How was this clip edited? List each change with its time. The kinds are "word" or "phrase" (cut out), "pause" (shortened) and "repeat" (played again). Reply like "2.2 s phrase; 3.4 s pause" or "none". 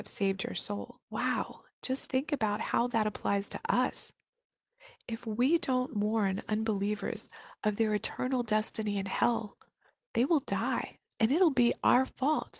1.0 s pause